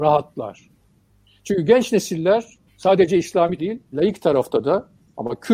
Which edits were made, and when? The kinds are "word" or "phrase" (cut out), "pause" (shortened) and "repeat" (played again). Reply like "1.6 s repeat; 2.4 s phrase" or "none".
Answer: 2.7 s pause; 3.6 s word; 3.9 s word